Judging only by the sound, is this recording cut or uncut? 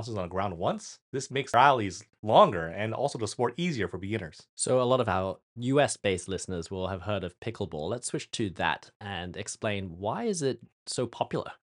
cut